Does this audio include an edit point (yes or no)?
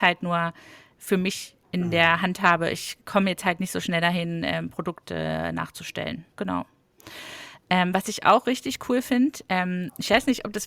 yes